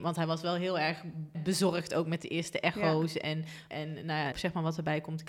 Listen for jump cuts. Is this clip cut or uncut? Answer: cut